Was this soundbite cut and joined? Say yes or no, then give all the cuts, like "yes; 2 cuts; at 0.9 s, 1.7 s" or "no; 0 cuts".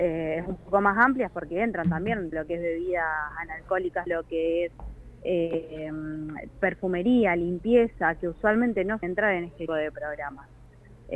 yes; 4 cuts; at 2.3 s, 4.1 s, 9.0 s, 9.7 s